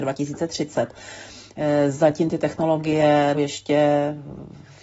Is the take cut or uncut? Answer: cut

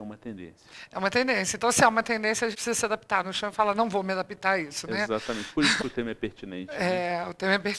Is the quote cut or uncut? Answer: cut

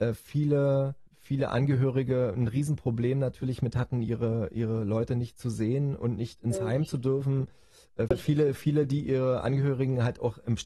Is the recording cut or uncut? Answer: cut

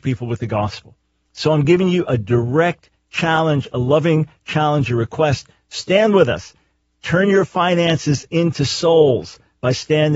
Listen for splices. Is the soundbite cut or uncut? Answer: uncut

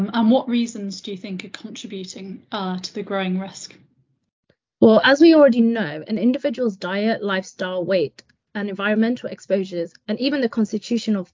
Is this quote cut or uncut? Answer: uncut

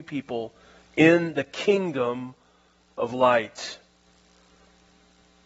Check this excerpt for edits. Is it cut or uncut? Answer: uncut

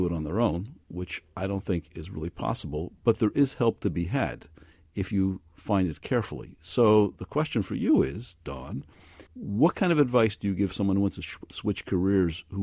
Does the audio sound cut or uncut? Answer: cut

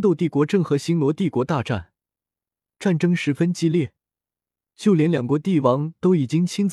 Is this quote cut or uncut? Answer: uncut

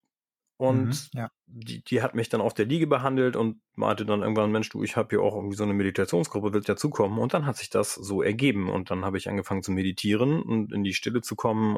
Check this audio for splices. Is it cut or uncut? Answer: cut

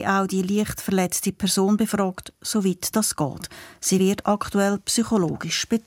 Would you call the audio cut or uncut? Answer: uncut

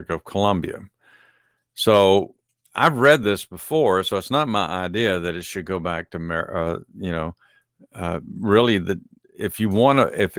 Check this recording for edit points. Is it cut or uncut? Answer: uncut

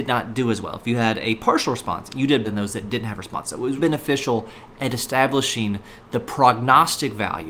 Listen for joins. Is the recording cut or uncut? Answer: cut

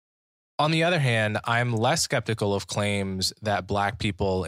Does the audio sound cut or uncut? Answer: uncut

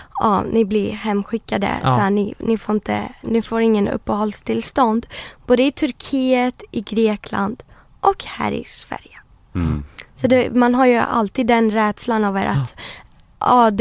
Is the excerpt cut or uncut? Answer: uncut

